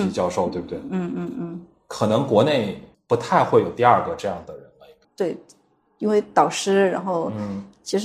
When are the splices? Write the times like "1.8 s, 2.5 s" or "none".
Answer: none